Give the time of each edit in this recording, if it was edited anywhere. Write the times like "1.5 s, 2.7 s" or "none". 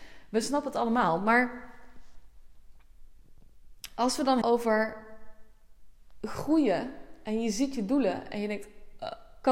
4.4 s